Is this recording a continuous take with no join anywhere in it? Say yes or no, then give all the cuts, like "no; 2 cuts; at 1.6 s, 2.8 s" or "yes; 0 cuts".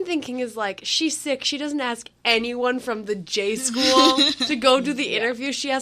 yes; 0 cuts